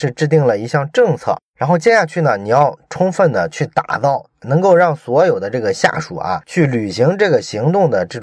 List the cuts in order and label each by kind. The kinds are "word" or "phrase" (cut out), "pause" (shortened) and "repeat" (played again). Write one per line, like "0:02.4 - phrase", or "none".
0:01.5 - pause